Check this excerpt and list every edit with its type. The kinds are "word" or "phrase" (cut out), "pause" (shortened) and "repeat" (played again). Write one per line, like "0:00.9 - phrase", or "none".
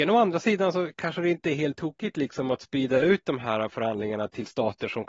none